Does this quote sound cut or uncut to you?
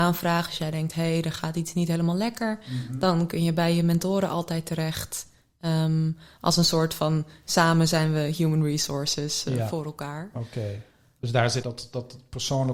cut